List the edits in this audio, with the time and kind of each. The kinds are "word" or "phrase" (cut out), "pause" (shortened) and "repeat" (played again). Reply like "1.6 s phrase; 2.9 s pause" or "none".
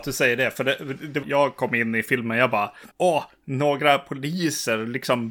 1.2 s phrase; 2.9 s pause